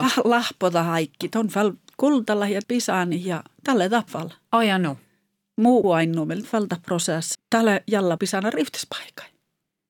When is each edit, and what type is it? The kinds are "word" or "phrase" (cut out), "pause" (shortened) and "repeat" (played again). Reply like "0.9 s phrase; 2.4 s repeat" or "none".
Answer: 2.6 s word; 4.1 s word; 5.8 s word; 6.4 s word; 7.3 s word; 8.2 s word